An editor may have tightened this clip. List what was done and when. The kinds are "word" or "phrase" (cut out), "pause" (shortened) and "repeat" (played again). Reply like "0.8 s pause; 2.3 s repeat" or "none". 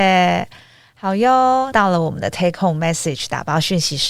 1.7 s phrase

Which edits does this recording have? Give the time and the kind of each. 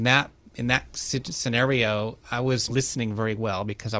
2.2 s word; 2.7 s phrase

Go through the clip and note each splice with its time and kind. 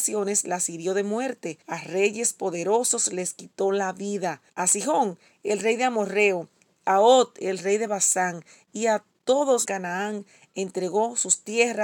1.6 s pause; 4.5 s pause; 9.6 s phrase

